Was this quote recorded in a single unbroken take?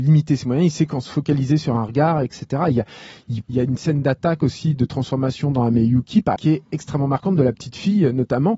no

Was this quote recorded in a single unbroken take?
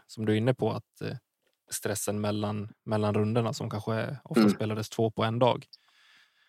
yes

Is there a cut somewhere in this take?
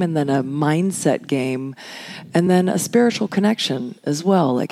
no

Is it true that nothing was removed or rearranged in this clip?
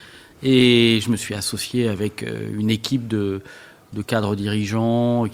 yes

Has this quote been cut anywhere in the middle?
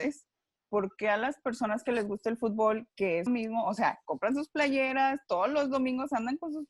yes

